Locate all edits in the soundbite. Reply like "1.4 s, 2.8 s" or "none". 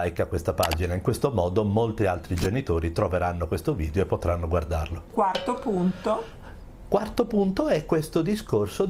none